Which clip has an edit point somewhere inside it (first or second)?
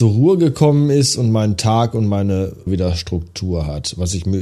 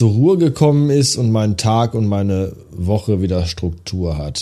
first